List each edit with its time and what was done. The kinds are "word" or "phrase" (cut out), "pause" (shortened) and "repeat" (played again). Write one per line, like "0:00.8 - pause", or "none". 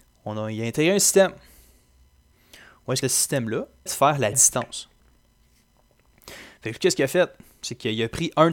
0:03.0 - word
0:03.9 - word
0:04.3 - phrase

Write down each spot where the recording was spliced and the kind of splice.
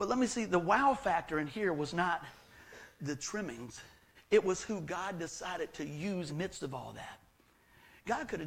0:03.0 - word
0:04.1 - pause
0:06.3 - phrase

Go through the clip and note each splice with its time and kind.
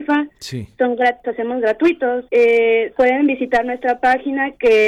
0:01.2 - word
0:02.3 - pause

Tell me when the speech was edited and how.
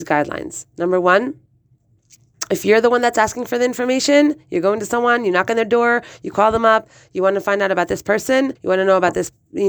0:08.6 - pause

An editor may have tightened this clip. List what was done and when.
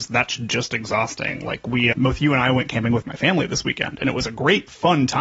0:01.9 - word

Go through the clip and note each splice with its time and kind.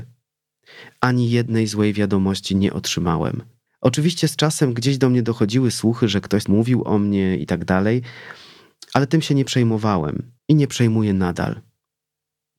0:03.7 - pause
0:06.4 - word
0:10.4 - pause

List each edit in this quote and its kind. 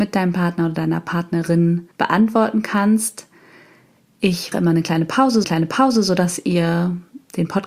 0:01.9 - pause
0:04.5 - word
0:05.4 - repeat

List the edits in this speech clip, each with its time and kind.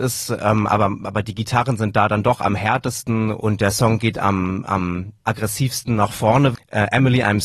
0:05.2 - pause

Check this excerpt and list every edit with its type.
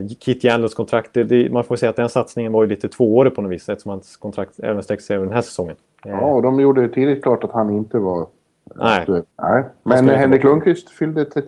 0:05.8 - pause
0:09.3 - pause

